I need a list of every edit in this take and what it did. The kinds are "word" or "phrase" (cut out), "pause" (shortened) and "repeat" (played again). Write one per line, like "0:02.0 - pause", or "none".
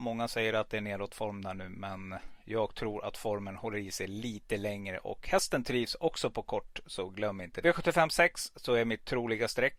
0:07.6 - word